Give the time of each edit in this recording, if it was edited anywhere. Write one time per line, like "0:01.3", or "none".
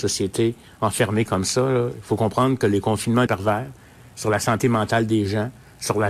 0:03.3